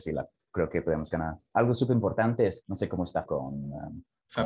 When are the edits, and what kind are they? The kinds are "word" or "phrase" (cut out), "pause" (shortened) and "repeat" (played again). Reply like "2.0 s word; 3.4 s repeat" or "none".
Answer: 2.6 s word; 3.3 s word